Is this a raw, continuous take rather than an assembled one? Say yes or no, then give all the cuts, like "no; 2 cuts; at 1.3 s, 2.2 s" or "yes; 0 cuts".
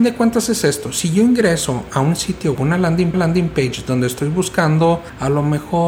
no; 2 cuts; at 2.5 s, 3.1 s